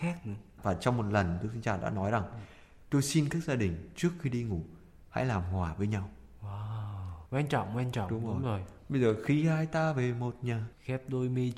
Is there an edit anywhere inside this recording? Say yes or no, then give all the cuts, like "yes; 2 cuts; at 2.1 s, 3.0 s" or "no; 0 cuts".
yes; 1 cut; at 7.2 s